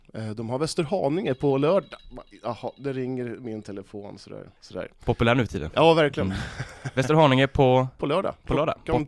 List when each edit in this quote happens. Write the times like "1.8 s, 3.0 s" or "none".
4.6 s